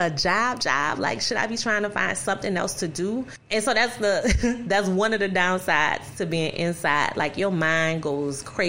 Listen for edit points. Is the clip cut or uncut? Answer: uncut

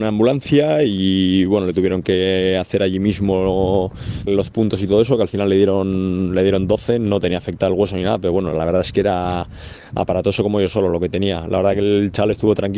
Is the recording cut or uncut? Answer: cut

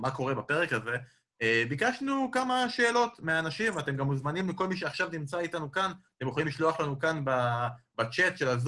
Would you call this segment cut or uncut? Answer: uncut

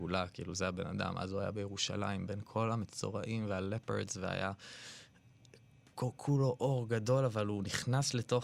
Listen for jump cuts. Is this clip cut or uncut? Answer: uncut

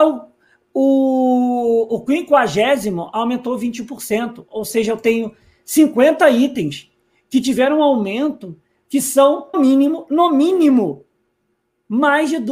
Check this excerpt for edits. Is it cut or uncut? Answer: cut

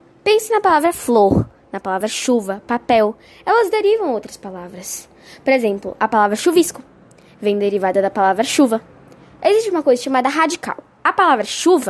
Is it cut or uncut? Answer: uncut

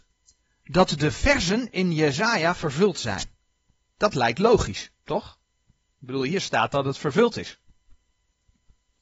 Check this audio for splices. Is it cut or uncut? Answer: uncut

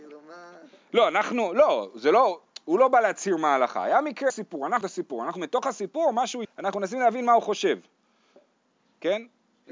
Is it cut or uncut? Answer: cut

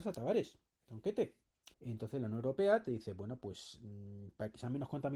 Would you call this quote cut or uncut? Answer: cut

